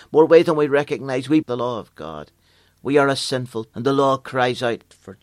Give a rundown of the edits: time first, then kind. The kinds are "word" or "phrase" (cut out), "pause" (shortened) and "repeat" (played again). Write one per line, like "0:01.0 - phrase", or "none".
0:01.4 - word
0:03.7 - word